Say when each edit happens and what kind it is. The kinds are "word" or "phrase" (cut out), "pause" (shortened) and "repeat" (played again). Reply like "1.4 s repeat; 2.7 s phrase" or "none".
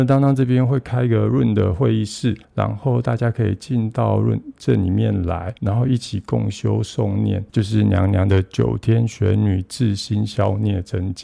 2.4 s pause; 5.6 s pause; 7.5 s pause